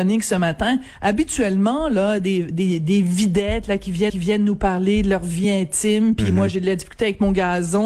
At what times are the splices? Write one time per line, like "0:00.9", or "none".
0:04.1